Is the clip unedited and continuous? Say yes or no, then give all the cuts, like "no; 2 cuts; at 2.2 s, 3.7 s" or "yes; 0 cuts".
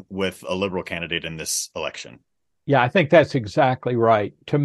yes; 0 cuts